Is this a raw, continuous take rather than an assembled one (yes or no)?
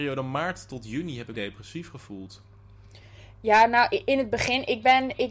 no